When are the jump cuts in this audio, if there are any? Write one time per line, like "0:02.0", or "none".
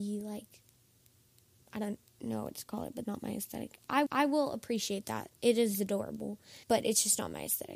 0:03.0
0:04.1
0:06.6

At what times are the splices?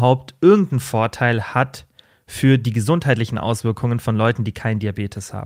none

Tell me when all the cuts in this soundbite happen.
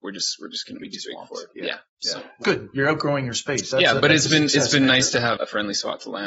0:02.4
0:05.4

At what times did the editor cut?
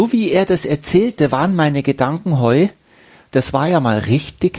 none

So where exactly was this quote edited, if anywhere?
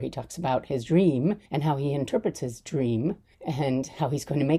0:01.4
0:03.3

